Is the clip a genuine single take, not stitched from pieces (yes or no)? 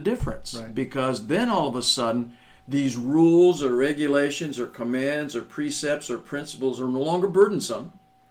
yes